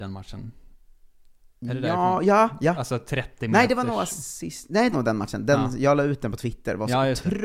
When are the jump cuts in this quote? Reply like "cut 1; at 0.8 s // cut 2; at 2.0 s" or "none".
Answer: cut 1; at 4.9 s